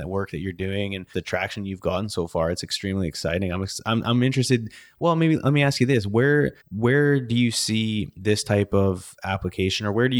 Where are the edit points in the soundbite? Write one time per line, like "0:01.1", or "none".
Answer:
0:01.1
0:06.6